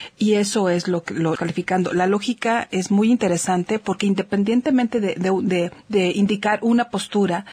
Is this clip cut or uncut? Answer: cut